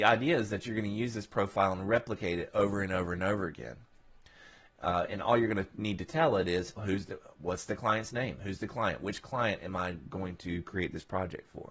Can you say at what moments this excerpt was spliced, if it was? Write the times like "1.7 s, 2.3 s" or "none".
6.8 s